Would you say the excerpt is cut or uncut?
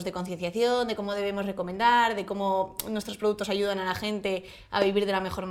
uncut